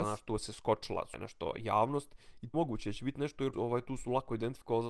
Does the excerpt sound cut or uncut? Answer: cut